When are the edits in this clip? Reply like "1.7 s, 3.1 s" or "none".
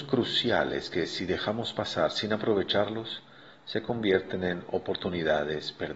none

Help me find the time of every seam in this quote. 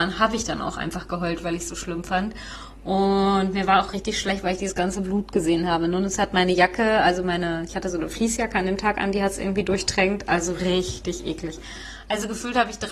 3.9 s

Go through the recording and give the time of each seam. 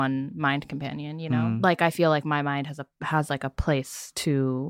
none

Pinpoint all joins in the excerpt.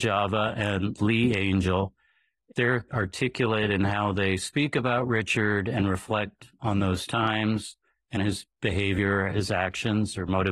2.9 s, 8.2 s

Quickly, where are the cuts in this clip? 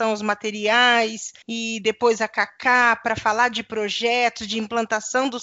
1.4 s

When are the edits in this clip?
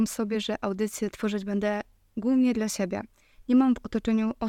none

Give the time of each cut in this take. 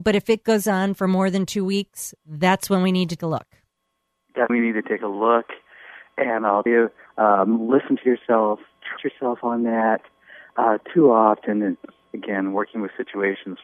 3.2 s, 4.5 s, 6.7 s, 9.0 s

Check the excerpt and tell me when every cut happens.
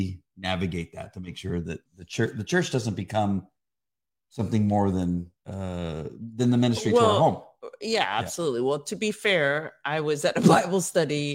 1.9 s, 5.4 s

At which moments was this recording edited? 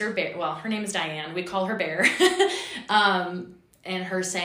none

